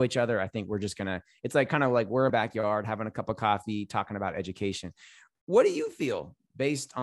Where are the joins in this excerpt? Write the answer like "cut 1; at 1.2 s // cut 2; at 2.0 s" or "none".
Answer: cut 1; at 2.3 s

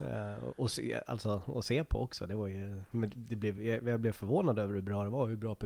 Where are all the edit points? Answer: none

